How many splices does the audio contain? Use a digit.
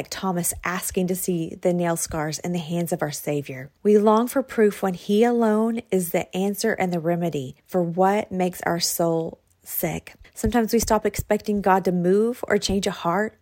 3